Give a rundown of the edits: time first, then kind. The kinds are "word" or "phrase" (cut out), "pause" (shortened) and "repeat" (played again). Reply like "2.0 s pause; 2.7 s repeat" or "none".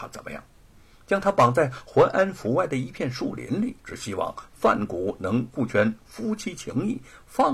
3.8 s pause